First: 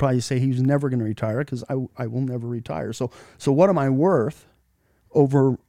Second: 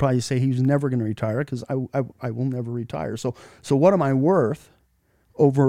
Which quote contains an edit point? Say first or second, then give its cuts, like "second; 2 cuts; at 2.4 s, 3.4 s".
first; 1 cut; at 1.9 s